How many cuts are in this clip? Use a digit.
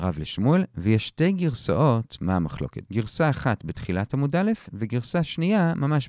0